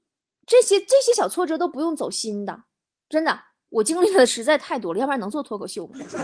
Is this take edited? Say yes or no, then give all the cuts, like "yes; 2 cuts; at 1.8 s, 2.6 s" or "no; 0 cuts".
no; 0 cuts